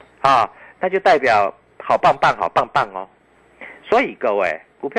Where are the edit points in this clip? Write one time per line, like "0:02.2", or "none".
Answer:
none